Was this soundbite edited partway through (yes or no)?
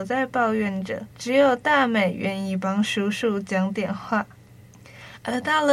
yes